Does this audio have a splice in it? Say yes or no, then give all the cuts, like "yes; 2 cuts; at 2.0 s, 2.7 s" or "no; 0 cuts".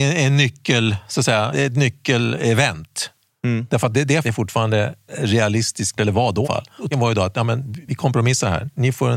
yes; 7 cuts; at 1.5 s, 3.9 s, 4.2 s, 6.0 s, 6.4 s, 6.9 s, 7.9 s